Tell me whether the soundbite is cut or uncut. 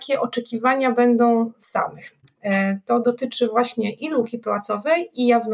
cut